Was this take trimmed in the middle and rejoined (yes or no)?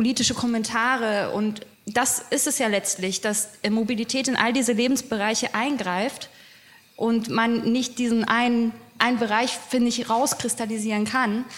yes